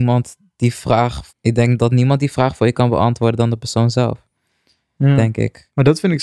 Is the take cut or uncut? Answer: cut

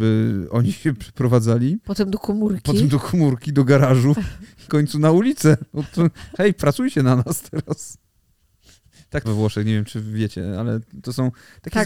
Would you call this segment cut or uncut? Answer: cut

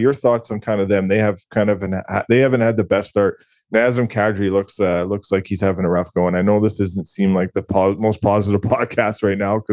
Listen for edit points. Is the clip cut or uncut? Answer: uncut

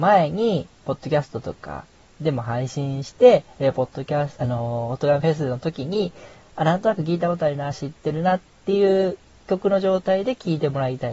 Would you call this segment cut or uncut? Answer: cut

